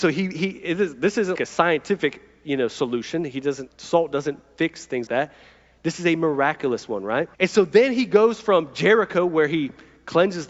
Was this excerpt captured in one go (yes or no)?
no